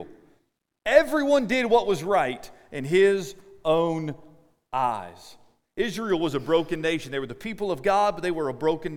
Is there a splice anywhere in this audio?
no; 0 cuts

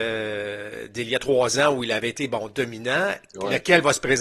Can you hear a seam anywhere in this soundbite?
no; 0 cuts

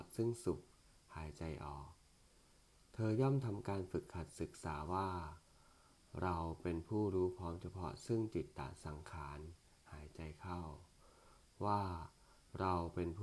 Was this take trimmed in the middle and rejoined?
no; 0 cuts

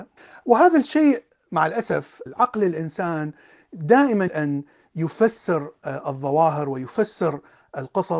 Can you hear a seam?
yes; 1 cut; at 4.3 s

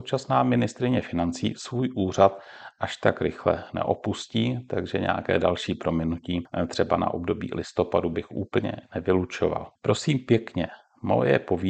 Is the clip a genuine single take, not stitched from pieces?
no; 1 cut; at 9.8 s

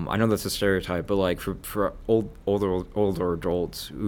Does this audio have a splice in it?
no; 0 cuts

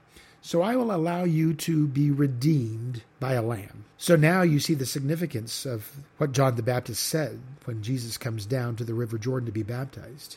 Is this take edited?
yes; 3 cuts; at 3.1 s, 3.9 s, 6.1 s

